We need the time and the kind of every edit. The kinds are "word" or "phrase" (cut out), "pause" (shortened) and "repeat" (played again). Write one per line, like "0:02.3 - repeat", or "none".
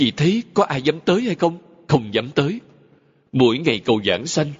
none